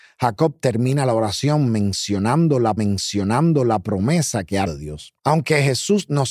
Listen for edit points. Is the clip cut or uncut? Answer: cut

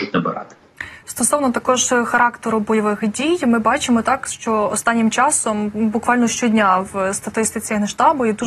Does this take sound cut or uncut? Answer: uncut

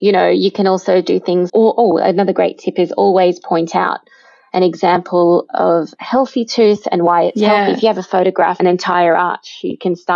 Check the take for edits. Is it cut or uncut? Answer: cut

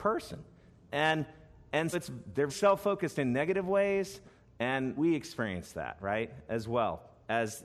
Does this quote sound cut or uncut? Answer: cut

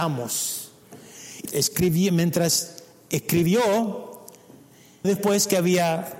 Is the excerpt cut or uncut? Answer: cut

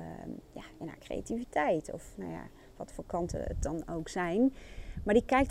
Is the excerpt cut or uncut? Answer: uncut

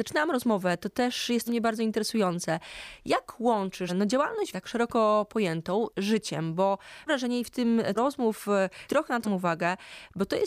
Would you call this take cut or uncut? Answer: cut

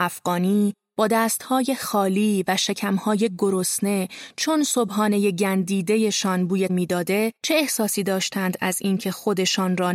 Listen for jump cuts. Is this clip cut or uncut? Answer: cut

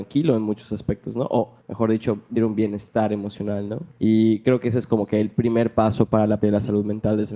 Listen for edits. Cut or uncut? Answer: cut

